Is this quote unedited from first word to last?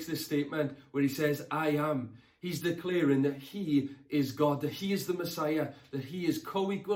yes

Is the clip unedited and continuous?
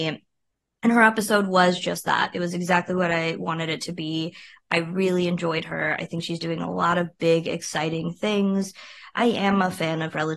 yes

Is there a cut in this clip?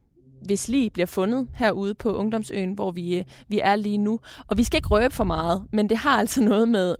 no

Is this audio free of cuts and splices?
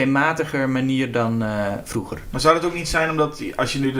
yes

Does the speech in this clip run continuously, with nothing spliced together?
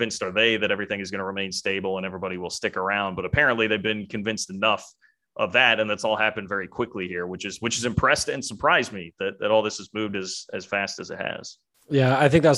yes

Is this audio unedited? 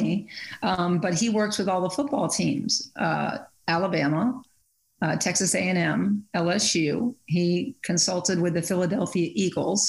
yes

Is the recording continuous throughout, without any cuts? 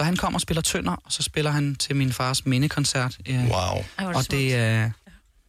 yes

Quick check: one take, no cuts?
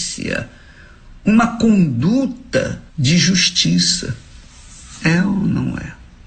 no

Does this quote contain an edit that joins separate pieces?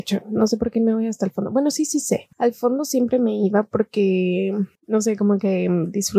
yes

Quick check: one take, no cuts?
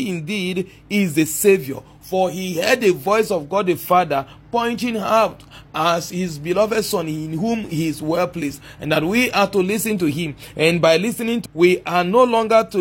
no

